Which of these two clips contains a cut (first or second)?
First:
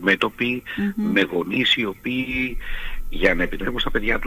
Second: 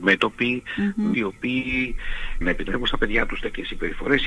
second